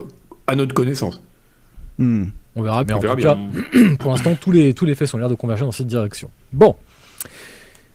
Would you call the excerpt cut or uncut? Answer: cut